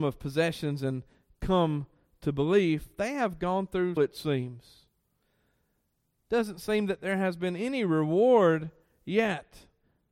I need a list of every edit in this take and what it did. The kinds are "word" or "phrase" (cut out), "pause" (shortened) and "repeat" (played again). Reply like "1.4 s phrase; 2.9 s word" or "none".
4.0 s phrase